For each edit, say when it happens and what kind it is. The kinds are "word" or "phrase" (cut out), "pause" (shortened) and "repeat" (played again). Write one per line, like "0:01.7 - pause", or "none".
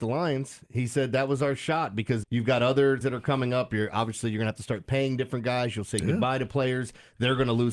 0:02.2 - word
0:03.0 - word